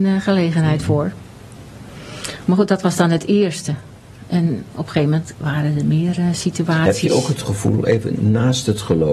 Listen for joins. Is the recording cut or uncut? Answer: uncut